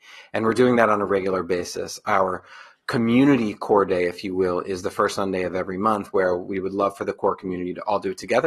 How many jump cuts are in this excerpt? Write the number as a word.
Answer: zero